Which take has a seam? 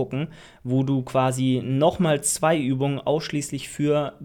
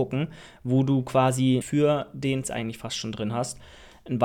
second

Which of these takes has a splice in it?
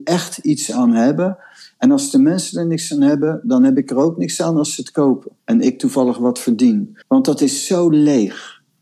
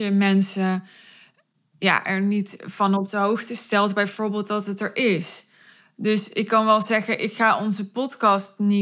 first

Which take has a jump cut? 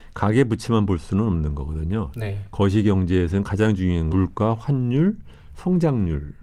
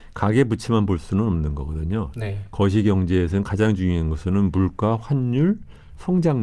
first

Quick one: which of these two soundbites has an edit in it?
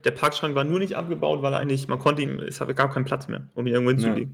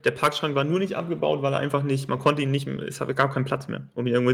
first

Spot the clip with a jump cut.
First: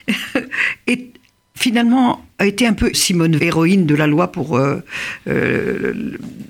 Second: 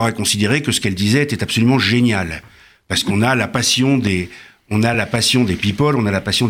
first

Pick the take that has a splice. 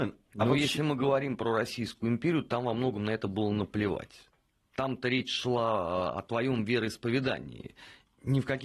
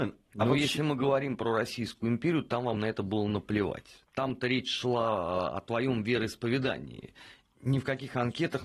second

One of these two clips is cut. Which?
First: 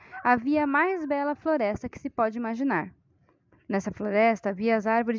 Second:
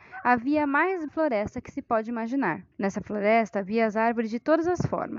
second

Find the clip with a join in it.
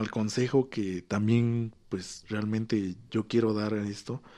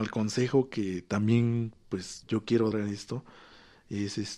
second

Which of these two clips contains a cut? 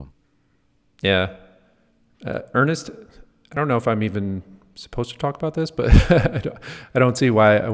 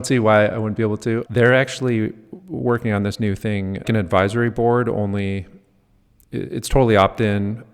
second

